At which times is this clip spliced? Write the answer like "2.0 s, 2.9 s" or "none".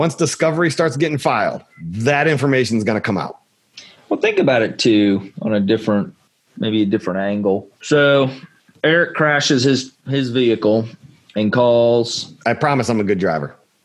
1.7 s, 7.8 s, 10.0 s